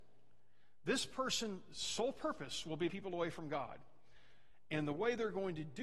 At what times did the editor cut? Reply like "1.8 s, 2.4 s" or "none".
2.9 s